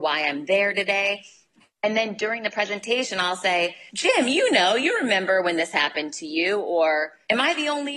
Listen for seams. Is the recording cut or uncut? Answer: uncut